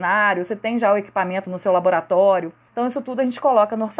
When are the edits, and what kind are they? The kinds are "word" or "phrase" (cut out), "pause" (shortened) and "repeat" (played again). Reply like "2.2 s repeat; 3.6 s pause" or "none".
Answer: 2.7 s pause